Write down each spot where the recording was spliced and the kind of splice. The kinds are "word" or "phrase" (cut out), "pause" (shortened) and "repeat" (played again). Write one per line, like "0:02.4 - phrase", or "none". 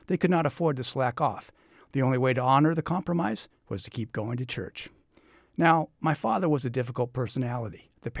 none